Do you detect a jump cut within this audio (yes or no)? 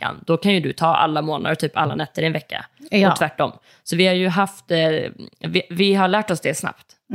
no